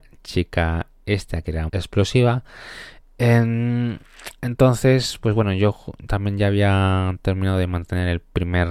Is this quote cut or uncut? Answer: cut